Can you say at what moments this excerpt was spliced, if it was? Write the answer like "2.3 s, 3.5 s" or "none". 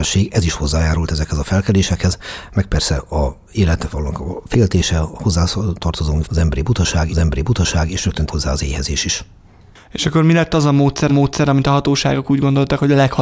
6.2 s, 7.1 s, 8.3 s, 11.1 s